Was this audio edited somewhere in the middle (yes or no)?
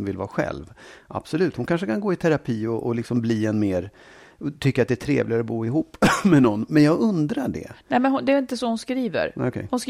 no